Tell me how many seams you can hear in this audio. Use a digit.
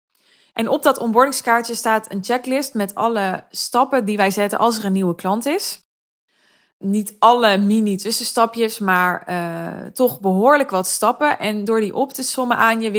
0